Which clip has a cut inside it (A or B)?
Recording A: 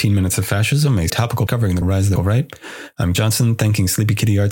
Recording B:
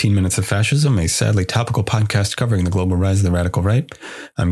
A